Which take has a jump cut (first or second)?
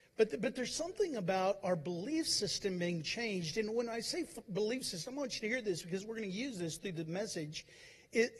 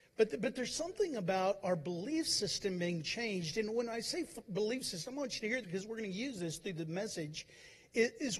second